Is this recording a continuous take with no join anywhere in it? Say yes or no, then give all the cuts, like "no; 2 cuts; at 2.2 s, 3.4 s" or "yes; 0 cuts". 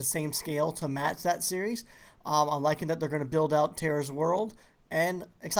yes; 0 cuts